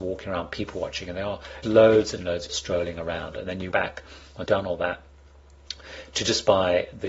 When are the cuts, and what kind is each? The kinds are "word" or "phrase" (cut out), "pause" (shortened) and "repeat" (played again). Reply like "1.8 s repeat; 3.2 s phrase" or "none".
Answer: 1.6 s word; 2.2 s word; 2.5 s word; 3.7 s word; 4.5 s word